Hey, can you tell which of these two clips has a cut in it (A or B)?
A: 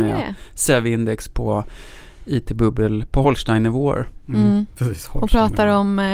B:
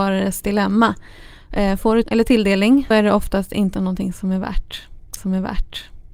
B